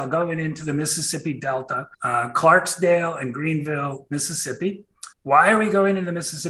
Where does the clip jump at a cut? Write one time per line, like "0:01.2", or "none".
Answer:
0:01.9
0:05.1